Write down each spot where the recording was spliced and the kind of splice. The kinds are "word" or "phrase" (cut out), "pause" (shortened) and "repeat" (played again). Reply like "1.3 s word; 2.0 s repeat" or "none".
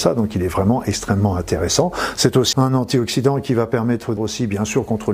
2.5 s word; 4.2 s word